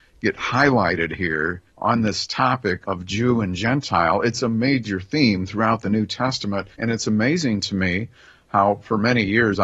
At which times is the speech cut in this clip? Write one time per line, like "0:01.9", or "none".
0:01.7
0:02.8
0:06.7